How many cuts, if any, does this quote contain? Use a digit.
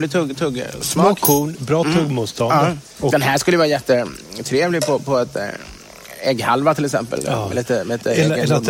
0